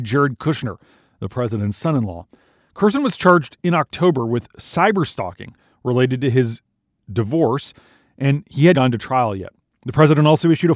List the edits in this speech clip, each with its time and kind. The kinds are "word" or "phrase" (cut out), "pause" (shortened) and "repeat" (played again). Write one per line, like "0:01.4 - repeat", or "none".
0:08.7 - word